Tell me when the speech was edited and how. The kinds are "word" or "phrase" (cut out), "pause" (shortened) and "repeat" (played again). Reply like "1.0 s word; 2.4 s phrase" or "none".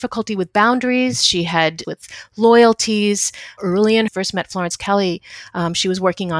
1.8 s phrase; 4.1 s phrase